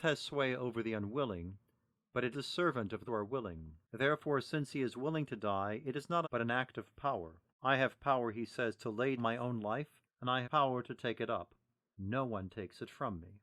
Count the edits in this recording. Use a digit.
8